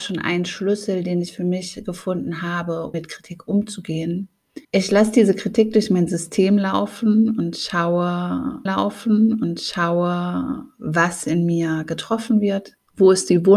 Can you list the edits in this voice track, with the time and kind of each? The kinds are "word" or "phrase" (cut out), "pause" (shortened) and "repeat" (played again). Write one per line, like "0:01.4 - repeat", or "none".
0:02.9 - word
0:04.6 - pause
0:08.7 - repeat